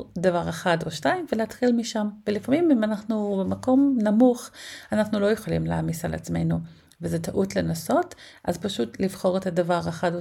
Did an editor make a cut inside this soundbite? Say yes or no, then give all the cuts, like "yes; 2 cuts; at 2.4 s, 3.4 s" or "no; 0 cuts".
no; 0 cuts